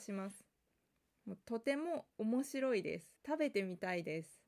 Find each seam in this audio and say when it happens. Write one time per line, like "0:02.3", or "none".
0:03.2